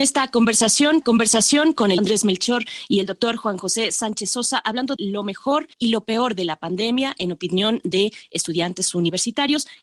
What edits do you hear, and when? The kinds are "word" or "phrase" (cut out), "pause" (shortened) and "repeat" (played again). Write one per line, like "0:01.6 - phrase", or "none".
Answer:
0:01.0 - repeat
0:02.0 - word
0:05.0 - word
0:05.7 - pause